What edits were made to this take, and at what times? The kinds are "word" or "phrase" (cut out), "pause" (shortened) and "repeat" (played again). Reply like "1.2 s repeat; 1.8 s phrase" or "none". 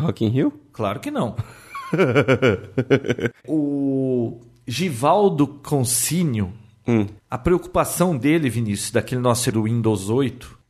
3.4 s pause; 7.2 s pause; 9.5 s word